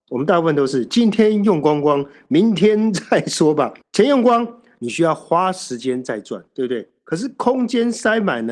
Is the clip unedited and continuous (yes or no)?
no